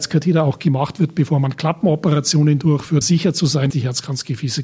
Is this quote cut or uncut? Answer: cut